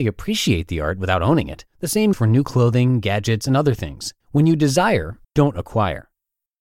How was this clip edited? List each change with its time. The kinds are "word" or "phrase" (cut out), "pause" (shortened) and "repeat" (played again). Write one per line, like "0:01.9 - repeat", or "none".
0:01.7 - pause
0:02.1 - word
0:04.2 - pause
0:05.2 - word